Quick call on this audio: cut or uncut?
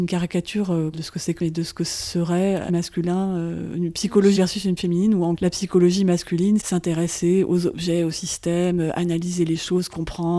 cut